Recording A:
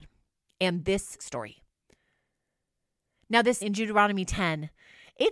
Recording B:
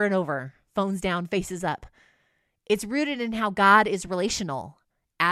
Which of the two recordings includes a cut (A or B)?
A